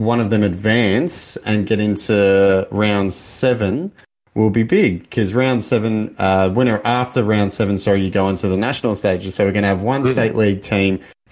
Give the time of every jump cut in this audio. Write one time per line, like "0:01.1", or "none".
none

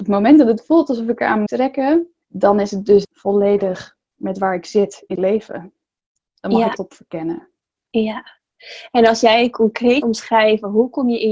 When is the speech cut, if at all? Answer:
0:01.5
0:02.2
0:03.0
0:04.0
0:05.2
0:06.8
0:07.6
0:10.0

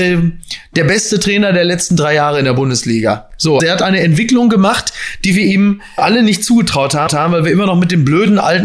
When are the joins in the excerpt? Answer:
0:03.6
0:06.0
0:07.1

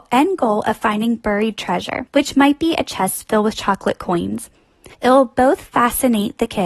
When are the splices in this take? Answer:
0:02.1
0:04.9

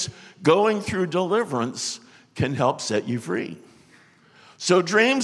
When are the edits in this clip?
none

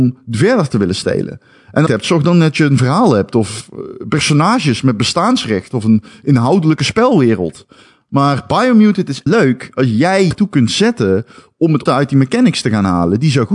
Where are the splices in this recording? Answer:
0:01.9
0:09.3
0:10.3
0:11.9

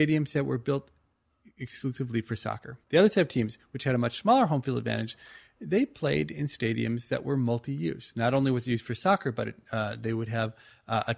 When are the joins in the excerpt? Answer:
0:02.8

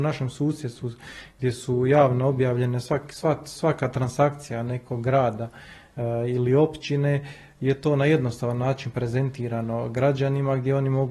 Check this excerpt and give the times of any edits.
none

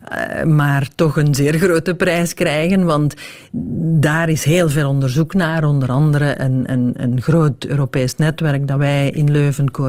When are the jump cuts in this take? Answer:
none

